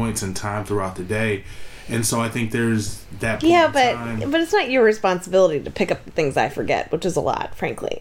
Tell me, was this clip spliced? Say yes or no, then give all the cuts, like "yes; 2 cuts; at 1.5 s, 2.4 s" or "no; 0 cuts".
no; 0 cuts